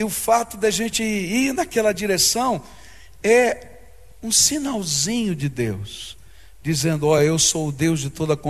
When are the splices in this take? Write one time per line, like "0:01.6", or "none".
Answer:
none